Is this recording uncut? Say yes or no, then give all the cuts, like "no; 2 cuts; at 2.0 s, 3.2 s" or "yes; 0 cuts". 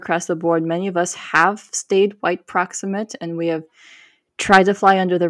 yes; 0 cuts